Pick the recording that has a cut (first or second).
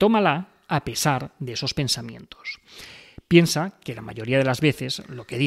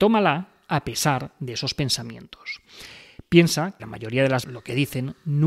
second